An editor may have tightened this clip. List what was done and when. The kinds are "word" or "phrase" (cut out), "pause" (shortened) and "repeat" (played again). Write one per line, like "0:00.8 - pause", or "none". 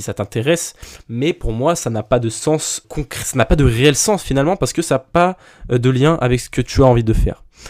0:02.8 - word